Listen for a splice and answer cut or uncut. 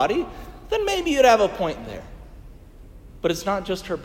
uncut